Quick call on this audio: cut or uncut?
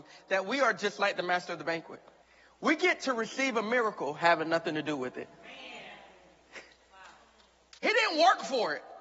cut